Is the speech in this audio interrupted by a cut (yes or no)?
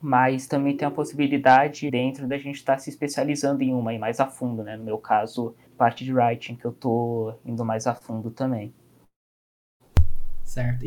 yes